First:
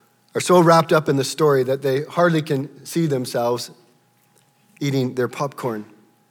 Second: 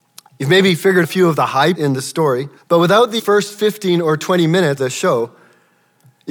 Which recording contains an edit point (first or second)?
second